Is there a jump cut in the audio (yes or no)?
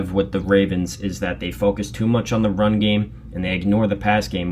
no